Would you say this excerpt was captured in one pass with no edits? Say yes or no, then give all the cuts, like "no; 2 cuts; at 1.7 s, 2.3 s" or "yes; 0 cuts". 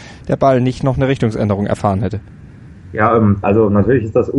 no; 1 cut; at 3.4 s